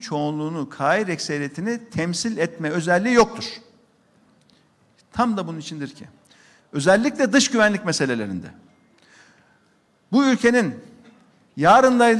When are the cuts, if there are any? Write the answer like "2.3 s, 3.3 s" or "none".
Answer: none